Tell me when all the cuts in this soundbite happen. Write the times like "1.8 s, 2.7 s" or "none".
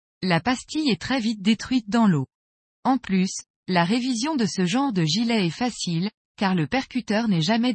none

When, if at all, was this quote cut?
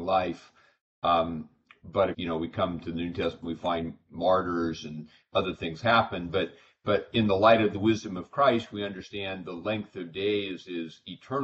2.1 s

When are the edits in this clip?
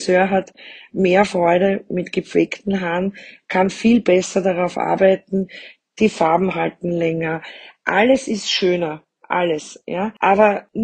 none

